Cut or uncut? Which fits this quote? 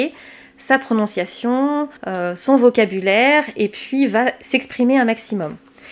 cut